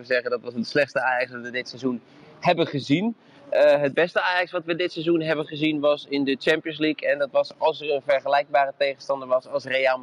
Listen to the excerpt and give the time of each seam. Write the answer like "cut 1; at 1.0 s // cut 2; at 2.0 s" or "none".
none